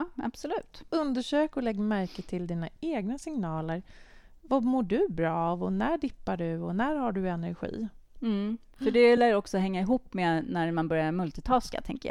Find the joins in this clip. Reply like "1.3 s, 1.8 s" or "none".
none